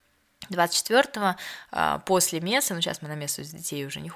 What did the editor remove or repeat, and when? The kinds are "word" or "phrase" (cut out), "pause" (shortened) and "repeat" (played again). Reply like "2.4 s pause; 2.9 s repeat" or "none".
none